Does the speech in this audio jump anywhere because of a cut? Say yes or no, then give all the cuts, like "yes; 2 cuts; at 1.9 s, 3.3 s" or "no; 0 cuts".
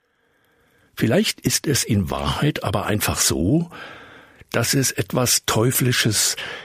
no; 0 cuts